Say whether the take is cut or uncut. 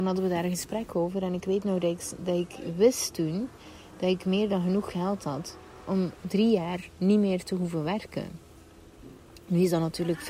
uncut